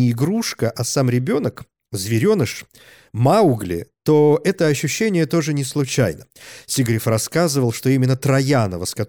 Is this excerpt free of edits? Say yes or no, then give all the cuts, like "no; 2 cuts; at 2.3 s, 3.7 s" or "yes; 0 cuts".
yes; 0 cuts